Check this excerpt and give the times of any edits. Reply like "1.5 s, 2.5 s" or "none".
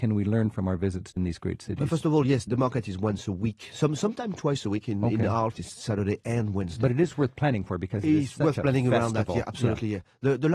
1.2 s, 2.5 s, 5.6 s